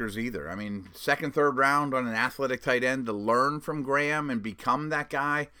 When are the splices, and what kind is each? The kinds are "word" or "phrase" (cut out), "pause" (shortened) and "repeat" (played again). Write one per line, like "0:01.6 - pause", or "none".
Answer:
none